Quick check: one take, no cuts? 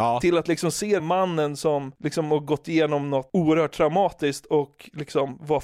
no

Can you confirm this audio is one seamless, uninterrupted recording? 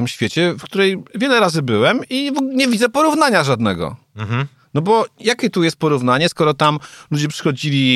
yes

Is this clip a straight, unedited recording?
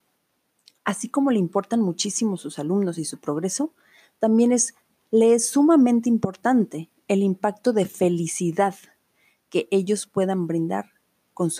yes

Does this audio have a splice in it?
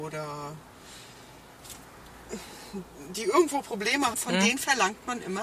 yes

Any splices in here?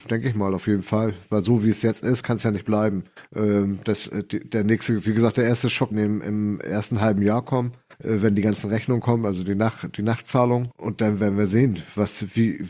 yes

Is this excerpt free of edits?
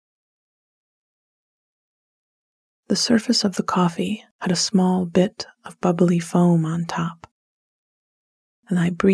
yes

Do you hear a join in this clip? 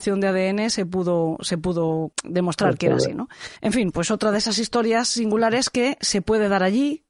yes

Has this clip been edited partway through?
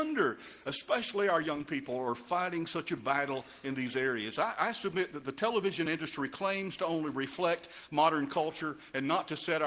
no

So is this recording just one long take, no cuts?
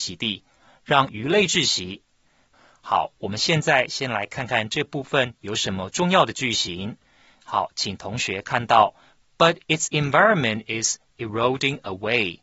yes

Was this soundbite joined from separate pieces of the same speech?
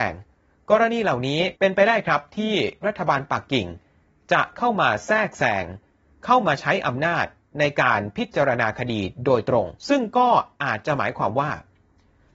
yes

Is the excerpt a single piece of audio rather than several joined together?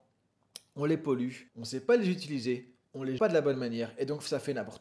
no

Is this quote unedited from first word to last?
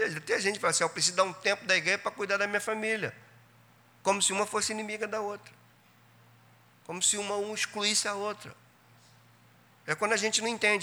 yes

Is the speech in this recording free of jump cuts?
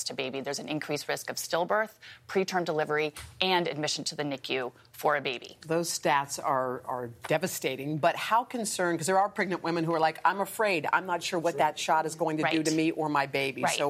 yes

